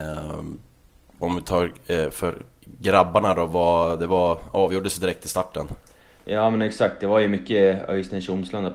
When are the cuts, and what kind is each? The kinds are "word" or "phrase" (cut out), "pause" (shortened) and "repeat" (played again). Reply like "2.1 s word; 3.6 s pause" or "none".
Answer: none